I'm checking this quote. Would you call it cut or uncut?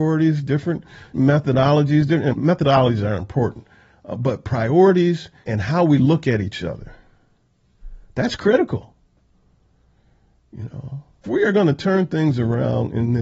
cut